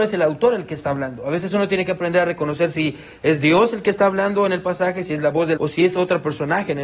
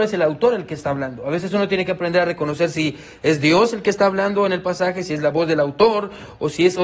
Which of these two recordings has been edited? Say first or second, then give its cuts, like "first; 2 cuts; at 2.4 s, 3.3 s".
first; 1 cut; at 5.6 s